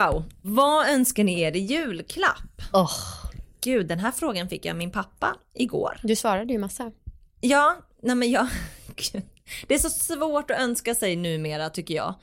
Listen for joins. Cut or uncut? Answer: uncut